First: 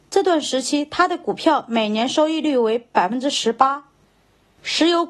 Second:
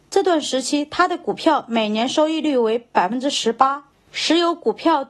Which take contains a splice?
second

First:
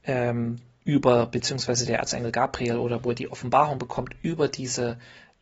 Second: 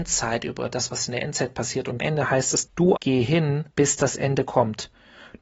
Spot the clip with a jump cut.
second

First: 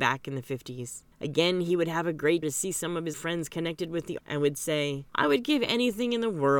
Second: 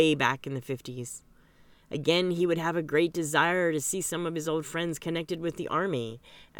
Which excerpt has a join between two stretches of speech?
first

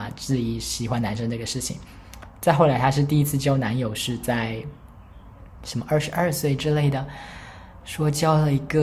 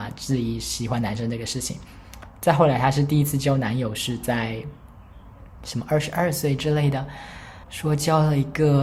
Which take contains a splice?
second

